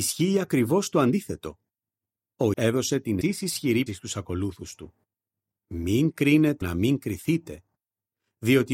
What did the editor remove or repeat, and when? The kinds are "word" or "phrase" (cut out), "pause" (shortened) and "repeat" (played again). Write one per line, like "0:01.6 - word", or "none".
0:02.5 - word
0:03.2 - word
0:03.9 - word
0:06.6 - word